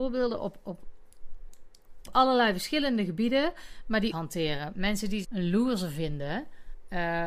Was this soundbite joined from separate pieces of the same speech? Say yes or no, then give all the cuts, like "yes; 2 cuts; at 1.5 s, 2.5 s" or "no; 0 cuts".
yes; 3 cuts; at 2.1 s, 4.1 s, 5.2 s